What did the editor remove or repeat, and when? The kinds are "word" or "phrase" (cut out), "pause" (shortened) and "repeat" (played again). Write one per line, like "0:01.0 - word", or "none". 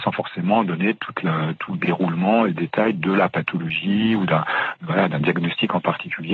none